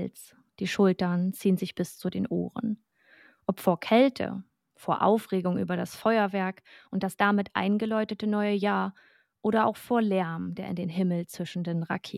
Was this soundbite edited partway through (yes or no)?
no